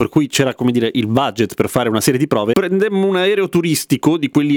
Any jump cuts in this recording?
no; 0 cuts

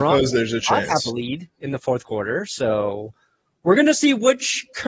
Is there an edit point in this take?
no; 0 cuts

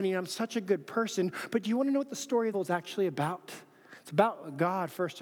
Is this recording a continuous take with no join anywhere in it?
no; 1 cut; at 2.5 s

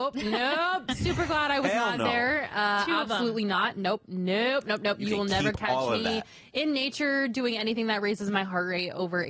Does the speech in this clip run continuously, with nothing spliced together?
yes; 0 cuts

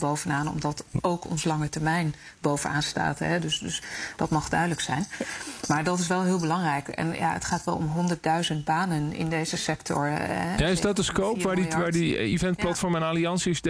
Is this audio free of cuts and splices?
yes; 0 cuts

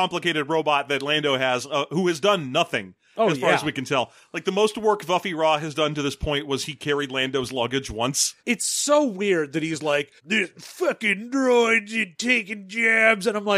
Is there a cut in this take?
yes; 2 cuts; at 8.4 s, 10.2 s

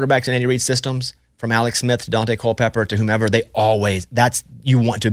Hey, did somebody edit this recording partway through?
no; 0 cuts

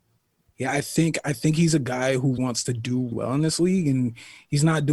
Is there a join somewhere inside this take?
yes; 2 cuts; at 2.4 s, 3.1 s

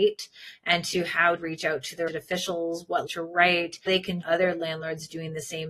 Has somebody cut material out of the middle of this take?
yes; 5 cuts; at 1.4 s, 2.1 s, 3.1 s, 3.9 s, 4.2 s

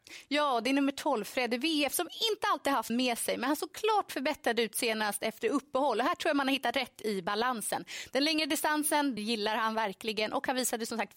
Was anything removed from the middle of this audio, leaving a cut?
yes; 2 cuts; at 2.9 s, 9.2 s

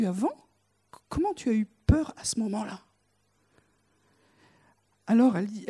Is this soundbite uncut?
yes; 0 cuts

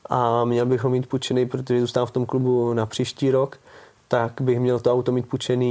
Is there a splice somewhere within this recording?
no; 0 cuts

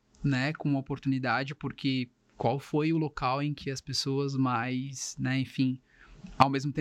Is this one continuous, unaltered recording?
yes; 0 cuts

